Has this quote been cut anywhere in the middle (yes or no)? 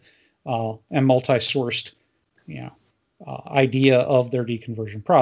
no